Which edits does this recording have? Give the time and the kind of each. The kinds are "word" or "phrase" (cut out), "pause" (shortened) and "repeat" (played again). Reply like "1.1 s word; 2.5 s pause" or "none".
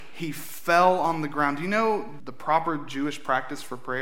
2.2 s word